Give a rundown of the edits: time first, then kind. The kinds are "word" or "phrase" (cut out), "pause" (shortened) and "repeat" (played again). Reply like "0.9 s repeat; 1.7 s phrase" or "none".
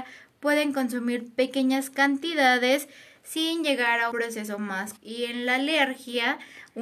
4.1 s word; 5.0 s word